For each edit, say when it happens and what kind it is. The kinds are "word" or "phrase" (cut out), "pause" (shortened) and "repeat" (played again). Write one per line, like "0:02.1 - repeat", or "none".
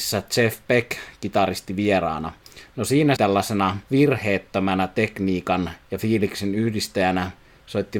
0:03.2 - phrase
0:03.9 - pause
0:05.8 - pause

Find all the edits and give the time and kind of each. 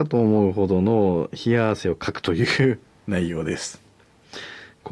none

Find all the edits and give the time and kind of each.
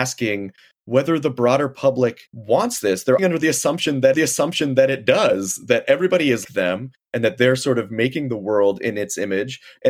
0:02.3 - pause
0:03.2 - word
0:04.1 - repeat
0:06.4 - word

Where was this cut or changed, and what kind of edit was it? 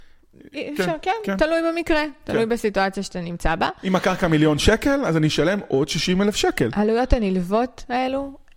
none

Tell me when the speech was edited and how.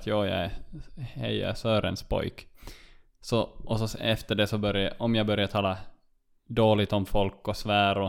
none

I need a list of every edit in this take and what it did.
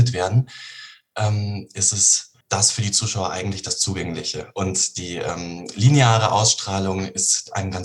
0:02.4 - pause

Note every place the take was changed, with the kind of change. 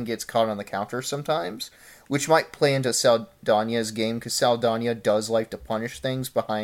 none

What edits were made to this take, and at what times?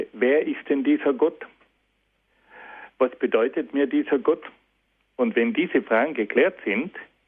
none

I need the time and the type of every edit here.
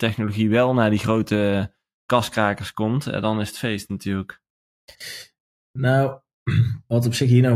none

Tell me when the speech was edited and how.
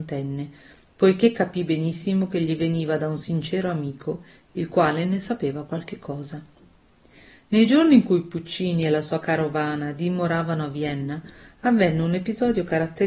none

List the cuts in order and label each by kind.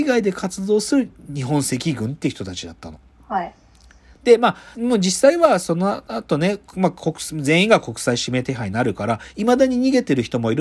0:04.7 - word

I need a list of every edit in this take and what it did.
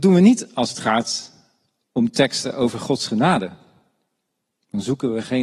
none

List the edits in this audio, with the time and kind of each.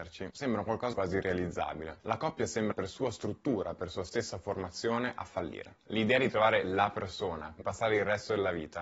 0:00.9 - word
0:02.7 - word
0:07.6 - word

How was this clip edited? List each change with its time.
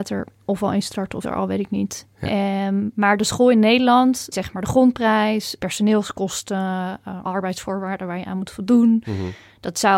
0:01.2 - word
0:04.3 - word
0:05.6 - word
0:07.2 - word

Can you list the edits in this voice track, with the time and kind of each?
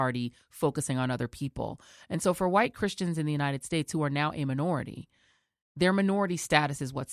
none

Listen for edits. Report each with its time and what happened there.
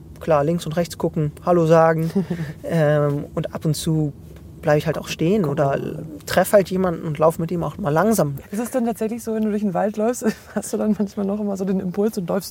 none

